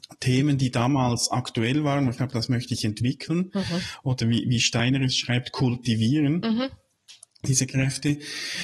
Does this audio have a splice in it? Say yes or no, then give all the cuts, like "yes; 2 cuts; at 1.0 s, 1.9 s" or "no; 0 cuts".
yes; 1 cut; at 2.2 s